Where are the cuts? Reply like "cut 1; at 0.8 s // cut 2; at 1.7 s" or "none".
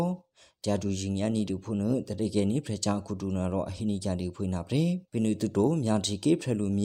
cut 1; at 5.1 s